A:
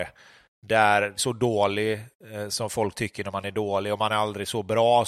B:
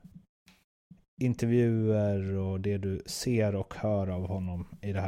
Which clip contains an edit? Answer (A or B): A